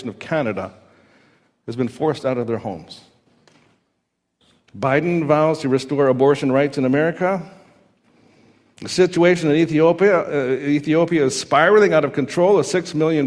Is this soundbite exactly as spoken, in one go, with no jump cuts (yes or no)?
yes